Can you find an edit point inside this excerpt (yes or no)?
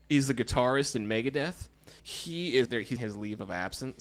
yes